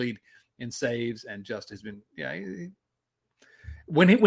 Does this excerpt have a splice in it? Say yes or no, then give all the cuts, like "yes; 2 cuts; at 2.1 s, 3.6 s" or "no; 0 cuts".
no; 0 cuts